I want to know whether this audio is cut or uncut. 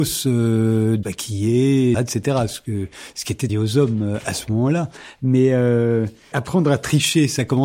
cut